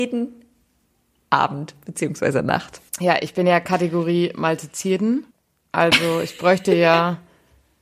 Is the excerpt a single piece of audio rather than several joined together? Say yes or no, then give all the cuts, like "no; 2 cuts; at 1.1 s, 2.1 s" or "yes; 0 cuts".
no; 2 cuts; at 2.9 s, 5.3 s